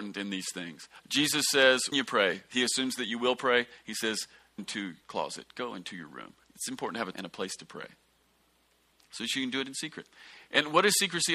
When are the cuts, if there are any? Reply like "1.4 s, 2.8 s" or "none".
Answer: 1.0 s, 1.9 s, 4.6 s, 5.0 s, 6.4 s, 7.1 s

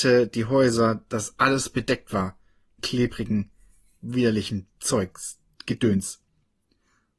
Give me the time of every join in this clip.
2.8 s

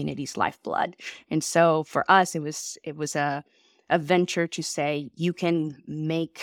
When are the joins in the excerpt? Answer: none

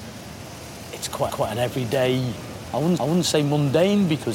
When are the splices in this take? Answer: 1.3 s, 3.0 s

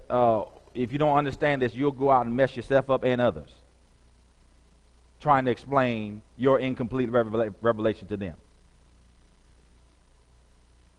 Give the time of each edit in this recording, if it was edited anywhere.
none

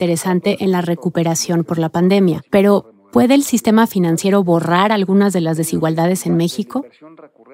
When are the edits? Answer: 2.5 s

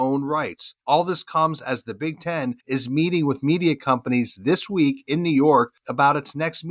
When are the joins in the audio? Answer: none

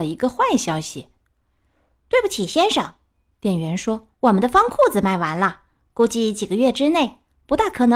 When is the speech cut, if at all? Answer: 4.1 s

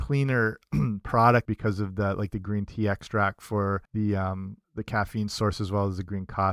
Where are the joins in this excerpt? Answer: 1.5 s, 3.9 s, 4.6 s

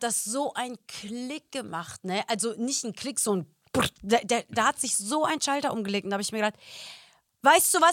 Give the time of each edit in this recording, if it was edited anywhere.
none

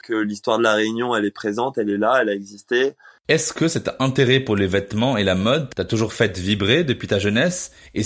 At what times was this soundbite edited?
none

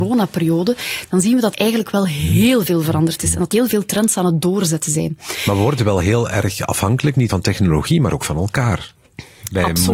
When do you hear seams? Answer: 1.5 s, 3.5 s, 7.3 s

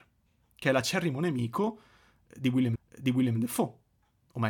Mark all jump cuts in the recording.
2.8 s

